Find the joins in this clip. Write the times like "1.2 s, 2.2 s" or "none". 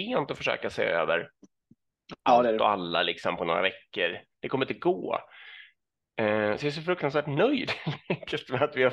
none